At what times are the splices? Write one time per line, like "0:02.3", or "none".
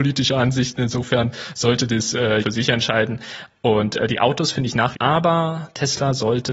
0:02.4
0:04.9